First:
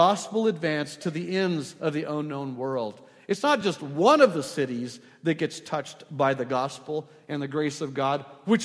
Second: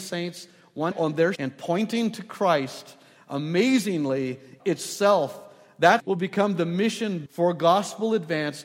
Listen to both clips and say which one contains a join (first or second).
second